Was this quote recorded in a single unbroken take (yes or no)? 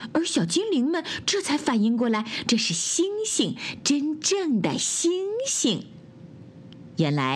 yes